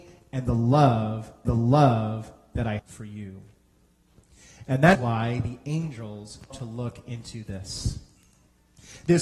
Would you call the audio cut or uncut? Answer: cut